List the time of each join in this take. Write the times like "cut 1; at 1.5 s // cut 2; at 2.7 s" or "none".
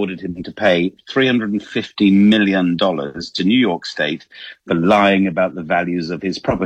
none